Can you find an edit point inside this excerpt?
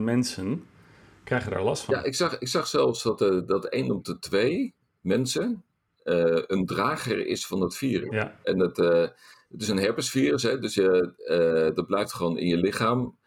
no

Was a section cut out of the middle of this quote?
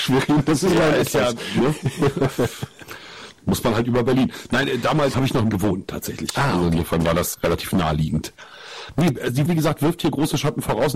yes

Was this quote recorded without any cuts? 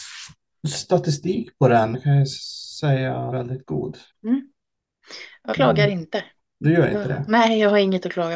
no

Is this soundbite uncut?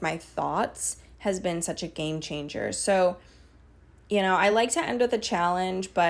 yes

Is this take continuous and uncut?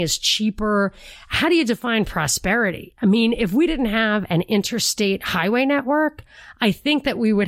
yes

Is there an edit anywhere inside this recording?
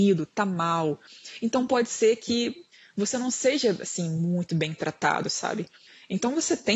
no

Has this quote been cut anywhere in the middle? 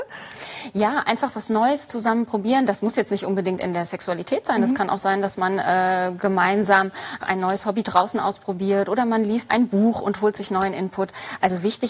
yes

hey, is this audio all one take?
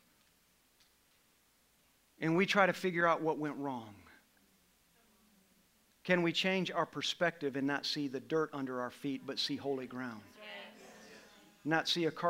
yes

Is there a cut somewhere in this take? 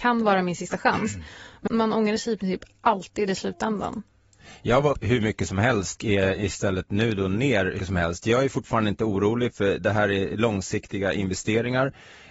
yes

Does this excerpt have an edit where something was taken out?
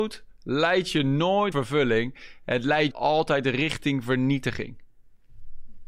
yes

